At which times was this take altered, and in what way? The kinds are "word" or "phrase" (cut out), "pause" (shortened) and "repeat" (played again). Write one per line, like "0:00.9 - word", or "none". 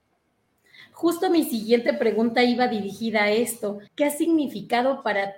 0:03.9 - pause

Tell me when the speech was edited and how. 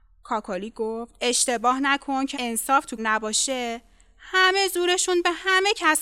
0:01.2 - pause
0:02.3 - word
0:03.0 - word

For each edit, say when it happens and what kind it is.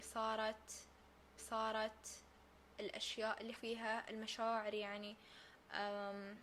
0:01.4 - repeat
0:03.6 - word

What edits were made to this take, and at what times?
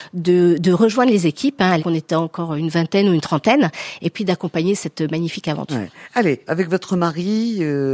0:01.8 - word
0:06.5 - word

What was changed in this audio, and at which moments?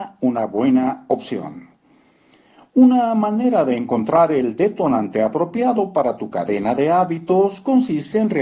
none

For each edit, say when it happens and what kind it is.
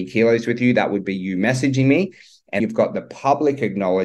0:02.6 - word

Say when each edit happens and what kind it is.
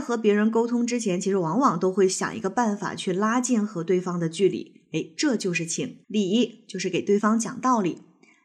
0:06.0 - pause

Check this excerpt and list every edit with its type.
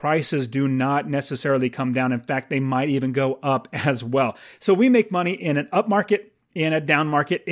none

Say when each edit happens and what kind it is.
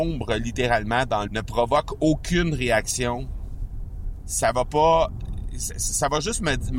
0:01.3 - word

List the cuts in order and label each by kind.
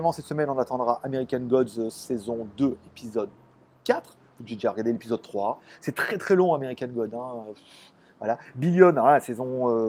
none

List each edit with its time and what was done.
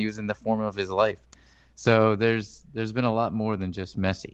none

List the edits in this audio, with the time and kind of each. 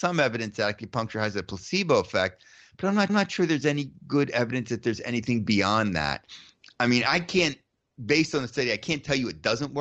0:03.1 - repeat

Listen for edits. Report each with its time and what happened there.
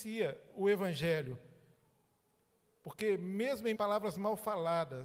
0:03.7 - word

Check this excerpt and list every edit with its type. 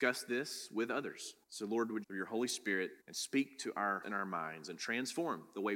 0:01.4 - pause
0:02.0 - phrase
0:03.0 - pause
0:04.0 - word

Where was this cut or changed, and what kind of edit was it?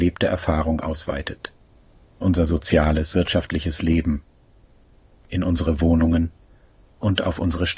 0:02.2 - word
0:03.1 - word

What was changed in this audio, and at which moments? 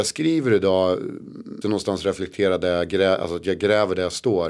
0:01.6 - word

